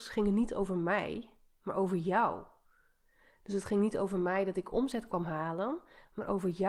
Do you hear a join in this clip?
no; 0 cuts

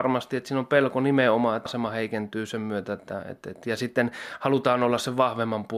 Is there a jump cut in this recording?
yes; 1 cut; at 1.7 s

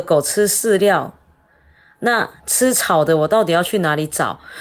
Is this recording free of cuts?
yes; 0 cuts

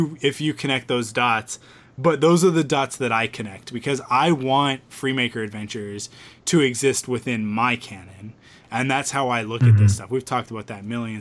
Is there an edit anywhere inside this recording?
no; 0 cuts

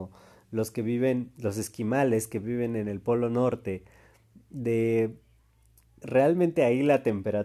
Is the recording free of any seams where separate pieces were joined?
no; 1 cut; at 6.0 s

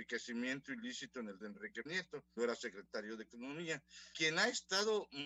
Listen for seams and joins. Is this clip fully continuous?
no; 4 cuts; at 1.4 s, 1.9 s, 2.4 s, 4.1 s

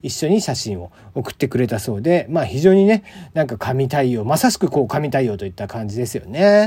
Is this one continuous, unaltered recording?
yes; 0 cuts

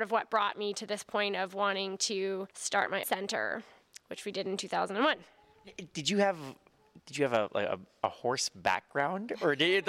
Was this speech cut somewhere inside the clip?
yes; 3 cuts; at 2.5 s, 3.0 s, 7.0 s

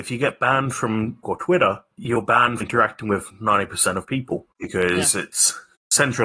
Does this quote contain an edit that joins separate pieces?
yes; 4 cuts; at 1.2 s, 1.9 s, 2.6 s, 4.5 s

